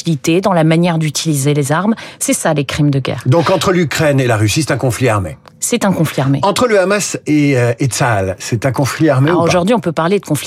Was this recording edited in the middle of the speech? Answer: no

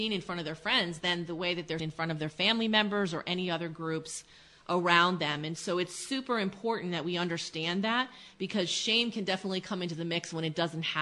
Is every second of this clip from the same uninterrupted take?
no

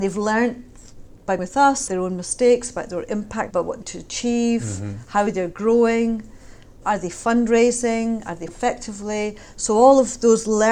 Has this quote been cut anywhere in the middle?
yes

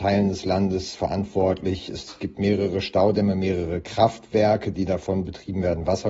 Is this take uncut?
yes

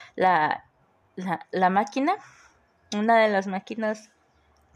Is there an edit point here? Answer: no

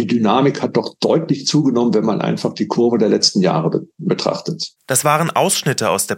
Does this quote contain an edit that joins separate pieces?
yes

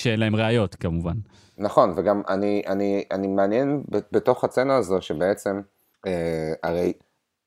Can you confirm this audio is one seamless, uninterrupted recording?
yes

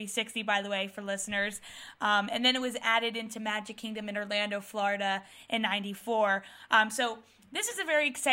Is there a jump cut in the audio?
no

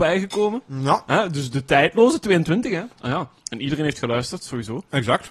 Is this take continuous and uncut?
no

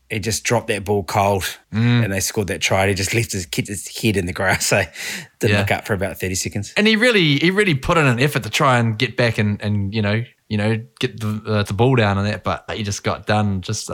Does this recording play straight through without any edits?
no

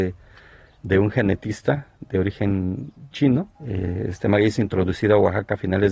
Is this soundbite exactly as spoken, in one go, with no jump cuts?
no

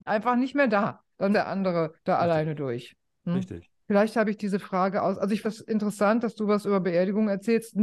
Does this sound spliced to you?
yes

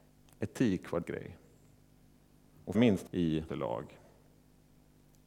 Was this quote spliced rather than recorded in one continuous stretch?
yes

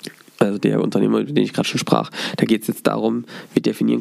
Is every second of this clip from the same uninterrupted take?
yes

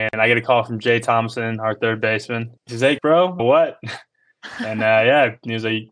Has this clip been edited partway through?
yes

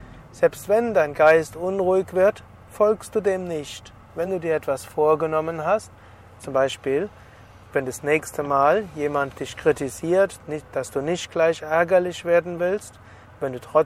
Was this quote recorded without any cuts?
yes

